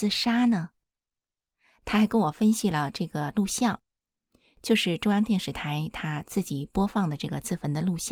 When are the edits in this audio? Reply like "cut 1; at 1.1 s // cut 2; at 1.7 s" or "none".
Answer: none